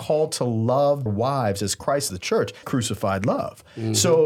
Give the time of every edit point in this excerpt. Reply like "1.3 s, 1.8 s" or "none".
1.1 s, 2.1 s, 2.6 s